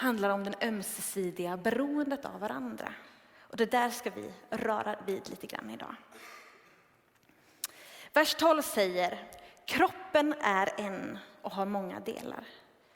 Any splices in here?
no; 0 cuts

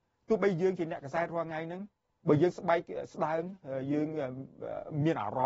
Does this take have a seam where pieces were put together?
no; 0 cuts

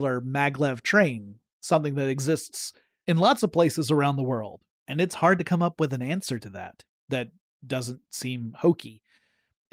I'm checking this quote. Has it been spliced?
no; 0 cuts

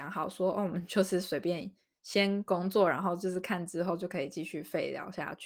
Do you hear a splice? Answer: no; 0 cuts

